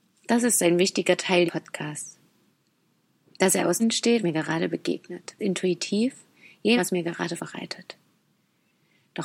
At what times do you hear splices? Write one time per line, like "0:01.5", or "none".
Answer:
0:01.5
0:03.8
0:04.2
0:05.4
0:06.8
0:07.4

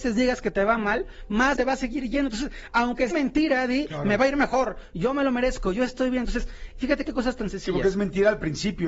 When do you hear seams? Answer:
0:01.6
0:03.1

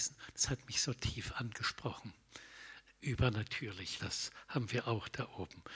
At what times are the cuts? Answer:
0:04.0

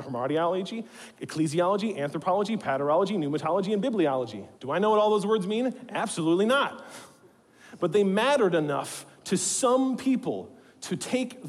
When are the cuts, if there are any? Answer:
0:04.5

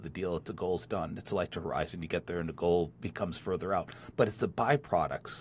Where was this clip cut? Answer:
none

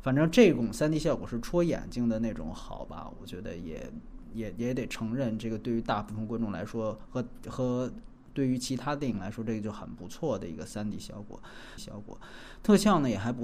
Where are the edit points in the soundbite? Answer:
0:11.8

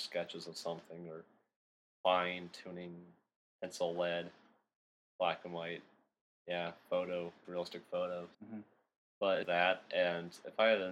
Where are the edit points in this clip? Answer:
0:07.4
0:08.3
0:09.4

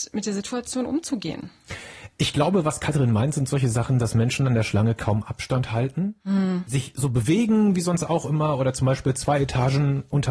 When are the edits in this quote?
none

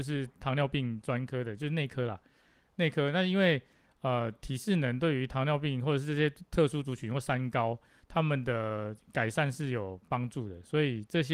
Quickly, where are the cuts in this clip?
none

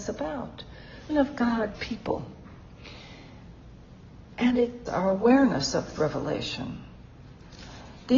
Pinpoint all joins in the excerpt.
0:01.1
0:01.8
0:04.9
0:06.0

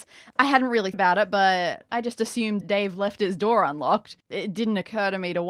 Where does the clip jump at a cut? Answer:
0:00.9
0:01.9
0:02.6
0:04.2

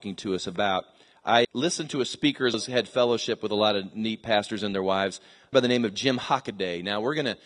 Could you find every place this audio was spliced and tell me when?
0:01.4
0:02.5
0:05.5

